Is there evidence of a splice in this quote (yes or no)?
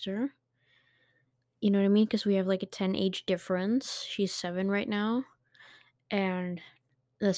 no